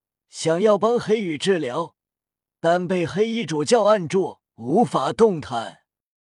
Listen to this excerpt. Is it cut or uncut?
cut